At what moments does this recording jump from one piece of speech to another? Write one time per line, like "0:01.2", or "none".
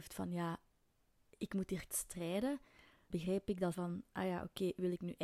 0:01.9
0:03.1
0:03.7